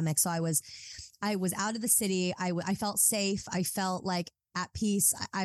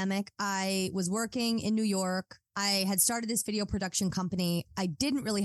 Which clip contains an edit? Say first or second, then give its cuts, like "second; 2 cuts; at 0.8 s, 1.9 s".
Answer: second; 1 cut; at 2.5 s